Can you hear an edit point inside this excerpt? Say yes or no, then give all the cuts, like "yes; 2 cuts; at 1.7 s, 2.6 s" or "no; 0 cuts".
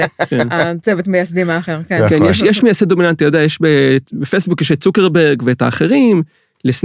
no; 0 cuts